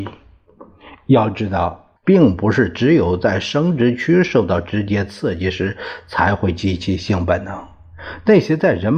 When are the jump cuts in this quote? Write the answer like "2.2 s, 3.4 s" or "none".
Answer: 2.0 s